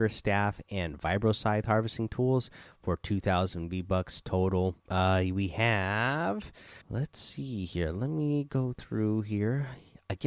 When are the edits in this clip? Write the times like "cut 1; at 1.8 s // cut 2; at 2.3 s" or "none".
cut 1; at 4.8 s // cut 2; at 6.8 s